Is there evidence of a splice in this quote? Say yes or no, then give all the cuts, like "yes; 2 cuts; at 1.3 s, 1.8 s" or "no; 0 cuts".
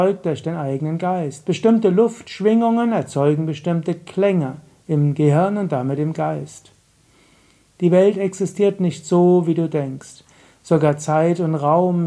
no; 0 cuts